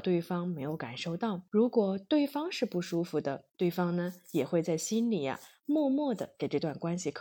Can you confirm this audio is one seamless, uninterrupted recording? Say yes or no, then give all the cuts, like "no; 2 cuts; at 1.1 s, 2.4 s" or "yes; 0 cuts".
no; 2 cuts; at 1.5 s, 3.5 s